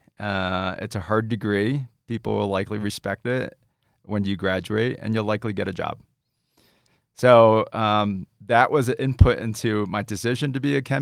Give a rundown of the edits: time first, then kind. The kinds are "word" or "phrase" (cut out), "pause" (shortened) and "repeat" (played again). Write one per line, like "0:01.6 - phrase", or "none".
none